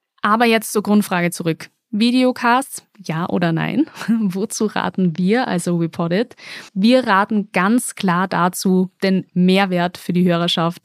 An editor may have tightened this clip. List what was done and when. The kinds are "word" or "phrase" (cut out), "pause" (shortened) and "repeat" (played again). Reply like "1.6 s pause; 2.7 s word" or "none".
6.7 s pause